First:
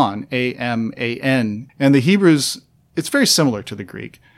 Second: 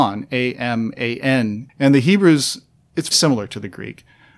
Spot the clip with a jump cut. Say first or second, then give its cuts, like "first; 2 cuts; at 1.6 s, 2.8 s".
second; 1 cut; at 3.1 s